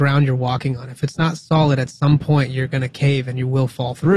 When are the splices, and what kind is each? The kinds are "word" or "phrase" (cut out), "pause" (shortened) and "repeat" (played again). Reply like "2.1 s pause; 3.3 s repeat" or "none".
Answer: none